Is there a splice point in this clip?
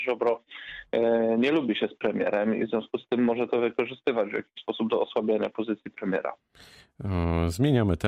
no; 0 cuts

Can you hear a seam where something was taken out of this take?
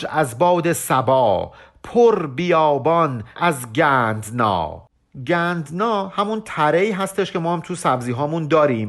yes; 1 cut; at 3.4 s

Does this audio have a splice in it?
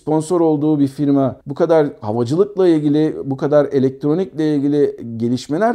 yes; 1 cut; at 1.4 s

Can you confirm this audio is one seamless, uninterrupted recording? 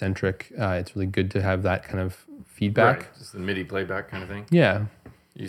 yes; 0 cuts

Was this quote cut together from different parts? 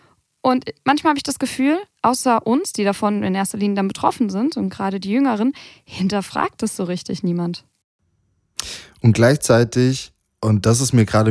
no; 0 cuts

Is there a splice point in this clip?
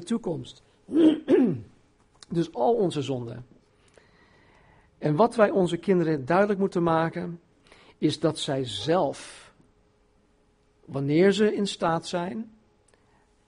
no; 0 cuts

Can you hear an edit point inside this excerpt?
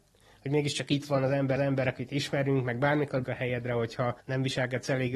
yes; 3 cuts; at 1.6 s, 3.2 s, 4.2 s

